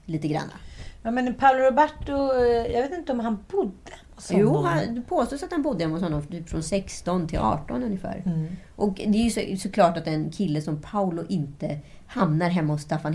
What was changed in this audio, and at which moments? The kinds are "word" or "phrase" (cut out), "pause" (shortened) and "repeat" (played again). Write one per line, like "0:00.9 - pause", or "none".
none